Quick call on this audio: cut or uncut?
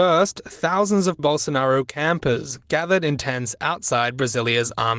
cut